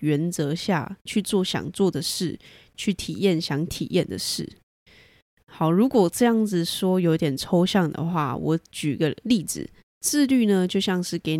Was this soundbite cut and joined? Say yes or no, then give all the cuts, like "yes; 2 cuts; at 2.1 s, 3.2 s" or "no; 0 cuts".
yes; 1 cut; at 9.8 s